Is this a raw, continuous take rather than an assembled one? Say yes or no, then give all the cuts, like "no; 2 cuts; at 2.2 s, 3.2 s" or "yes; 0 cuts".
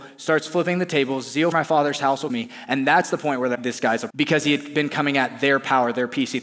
no; 4 cuts; at 1.5 s, 2.3 s, 3.5 s, 4.1 s